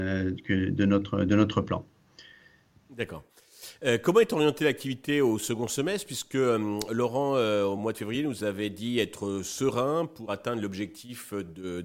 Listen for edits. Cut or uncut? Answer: uncut